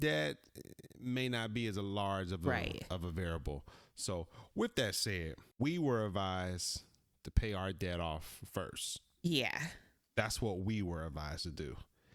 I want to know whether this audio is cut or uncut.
uncut